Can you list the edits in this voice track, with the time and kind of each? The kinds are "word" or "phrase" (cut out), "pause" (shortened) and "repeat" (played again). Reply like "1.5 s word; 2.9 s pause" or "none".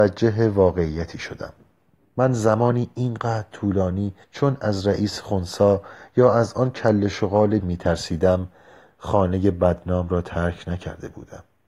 4.2 s pause; 7.6 s word